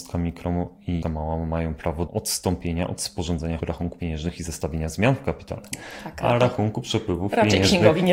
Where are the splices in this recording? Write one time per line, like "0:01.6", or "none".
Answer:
0:01.0
0:02.1
0:03.6
0:04.0